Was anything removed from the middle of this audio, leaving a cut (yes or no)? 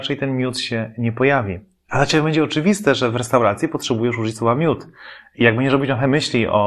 no